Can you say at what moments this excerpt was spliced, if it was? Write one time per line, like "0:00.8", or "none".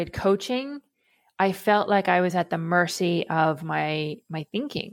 none